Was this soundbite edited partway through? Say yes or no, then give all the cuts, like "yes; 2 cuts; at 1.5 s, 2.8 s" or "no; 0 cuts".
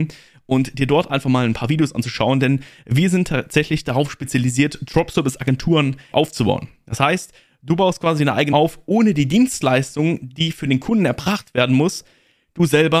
yes; 2 cuts; at 6.1 s, 8.5 s